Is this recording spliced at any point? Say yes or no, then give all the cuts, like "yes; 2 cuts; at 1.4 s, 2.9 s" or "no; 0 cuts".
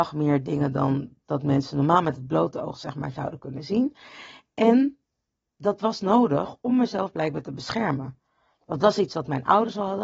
no; 0 cuts